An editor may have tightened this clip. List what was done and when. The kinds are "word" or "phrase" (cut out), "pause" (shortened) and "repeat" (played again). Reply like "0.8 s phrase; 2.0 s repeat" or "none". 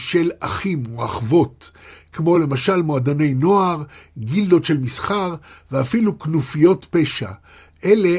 none